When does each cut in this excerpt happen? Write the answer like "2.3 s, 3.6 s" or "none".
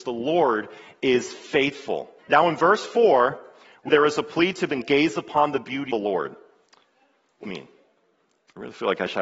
2.2 s, 3.9 s, 4.7 s, 5.9 s, 7.4 s